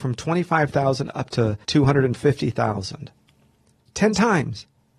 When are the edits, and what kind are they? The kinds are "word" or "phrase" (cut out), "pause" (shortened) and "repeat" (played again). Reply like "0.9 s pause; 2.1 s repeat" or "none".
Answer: 1.6 s pause